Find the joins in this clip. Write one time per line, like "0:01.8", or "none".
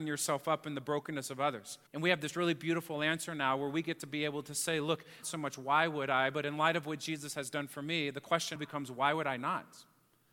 0:01.9
0:05.2
0:08.6